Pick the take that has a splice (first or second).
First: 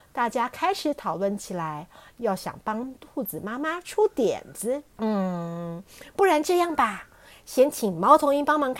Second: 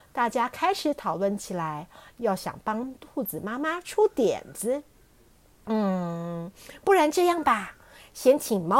first